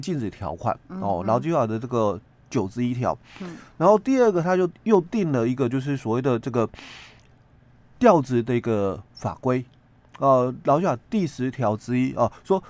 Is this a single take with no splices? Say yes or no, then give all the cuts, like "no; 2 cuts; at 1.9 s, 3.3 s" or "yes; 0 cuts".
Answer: yes; 0 cuts